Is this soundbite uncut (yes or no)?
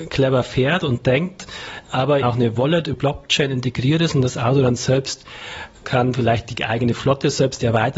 no